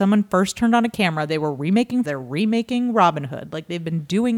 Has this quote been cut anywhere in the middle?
yes; 1 cut; at 2.0 s

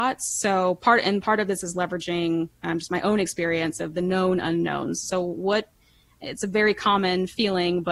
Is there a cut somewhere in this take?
no; 0 cuts

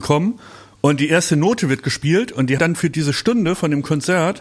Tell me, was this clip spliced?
yes; 1 cut; at 2.6 s

